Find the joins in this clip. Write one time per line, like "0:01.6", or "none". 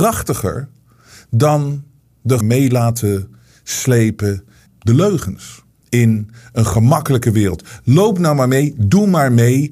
0:02.4
0:04.7
0:05.8